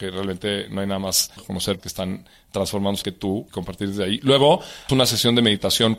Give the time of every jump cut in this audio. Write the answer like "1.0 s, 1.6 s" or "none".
1.4 s, 1.8 s, 3.0 s, 3.5 s, 4.9 s